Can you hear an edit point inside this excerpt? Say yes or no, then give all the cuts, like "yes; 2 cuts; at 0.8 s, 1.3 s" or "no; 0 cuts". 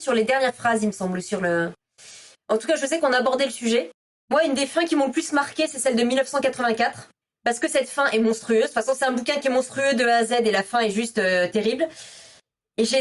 no; 0 cuts